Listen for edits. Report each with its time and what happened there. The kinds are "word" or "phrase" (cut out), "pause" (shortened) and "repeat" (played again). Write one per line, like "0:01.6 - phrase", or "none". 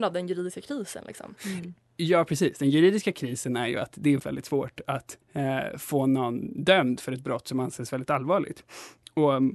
0:01.4 - pause
0:04.2 - word
0:05.2 - pause
0:07.9 - word